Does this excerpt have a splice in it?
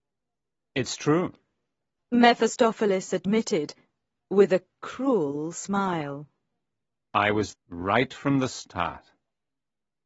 yes; 1 cut; at 7.5 s

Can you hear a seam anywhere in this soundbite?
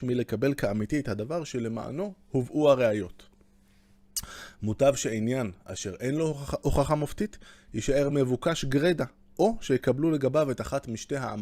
no; 0 cuts

